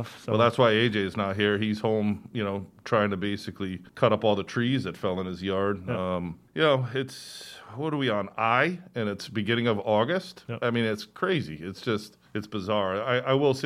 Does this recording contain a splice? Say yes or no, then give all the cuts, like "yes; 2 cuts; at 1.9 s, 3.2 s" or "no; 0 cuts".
yes; 3 cuts; at 3.9 s, 6.5 s, 12.2 s